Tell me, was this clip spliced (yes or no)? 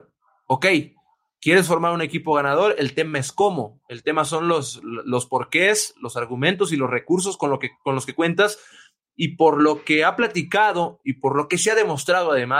no